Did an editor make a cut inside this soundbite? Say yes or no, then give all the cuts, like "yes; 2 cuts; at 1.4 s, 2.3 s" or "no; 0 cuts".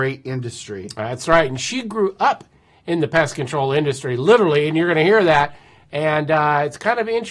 no; 0 cuts